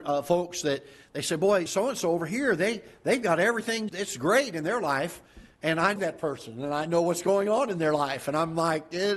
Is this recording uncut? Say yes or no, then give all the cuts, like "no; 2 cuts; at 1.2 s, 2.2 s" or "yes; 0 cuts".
no; 3 cuts; at 1.7 s, 3.9 s, 6.0 s